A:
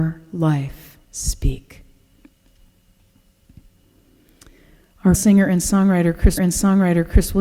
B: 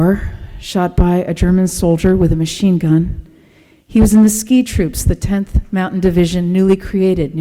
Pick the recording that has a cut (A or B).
A